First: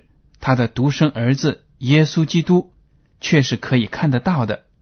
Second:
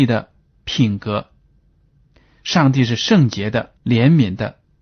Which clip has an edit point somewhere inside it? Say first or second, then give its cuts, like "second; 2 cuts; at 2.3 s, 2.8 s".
second; 1 cut; at 3.8 s